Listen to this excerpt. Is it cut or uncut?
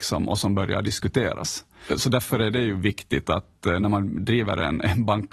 uncut